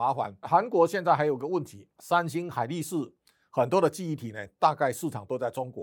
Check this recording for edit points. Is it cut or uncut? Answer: uncut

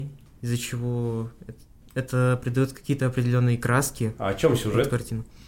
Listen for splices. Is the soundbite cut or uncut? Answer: uncut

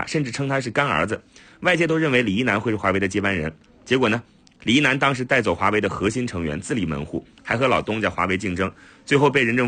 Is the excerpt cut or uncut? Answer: uncut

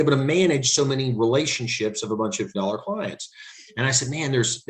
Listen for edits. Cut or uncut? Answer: cut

